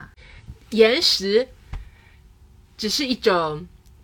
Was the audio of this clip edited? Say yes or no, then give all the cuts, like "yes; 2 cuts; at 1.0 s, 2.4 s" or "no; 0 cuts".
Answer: no; 0 cuts